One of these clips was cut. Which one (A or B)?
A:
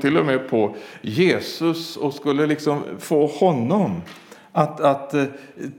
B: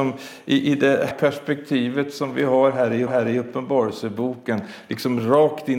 B